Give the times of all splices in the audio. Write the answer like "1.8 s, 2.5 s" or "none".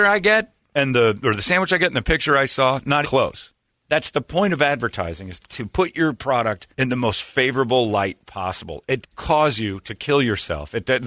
3.0 s, 3.7 s, 5.4 s, 6.7 s, 9.0 s